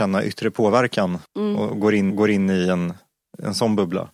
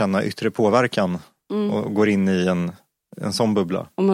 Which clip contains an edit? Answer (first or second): first